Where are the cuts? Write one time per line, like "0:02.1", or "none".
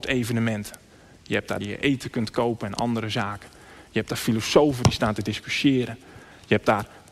0:01.6